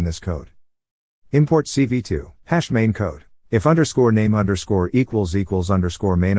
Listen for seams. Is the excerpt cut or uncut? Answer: cut